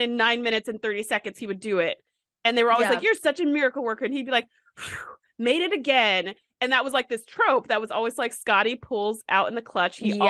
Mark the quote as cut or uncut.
uncut